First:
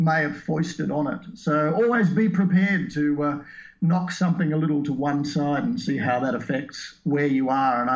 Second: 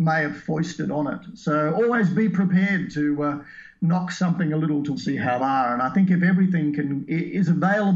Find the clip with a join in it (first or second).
second